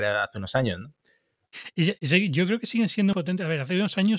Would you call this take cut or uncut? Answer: cut